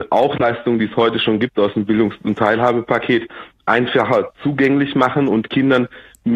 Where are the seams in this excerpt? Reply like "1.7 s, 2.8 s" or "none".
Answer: none